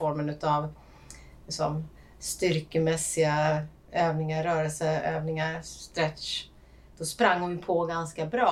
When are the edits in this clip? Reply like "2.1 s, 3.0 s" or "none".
none